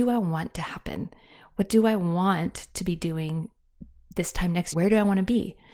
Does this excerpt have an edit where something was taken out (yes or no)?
yes